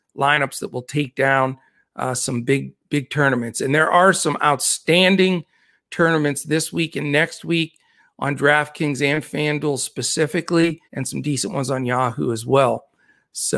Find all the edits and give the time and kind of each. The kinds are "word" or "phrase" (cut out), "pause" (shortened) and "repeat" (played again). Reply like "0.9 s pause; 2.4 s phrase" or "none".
10.8 s pause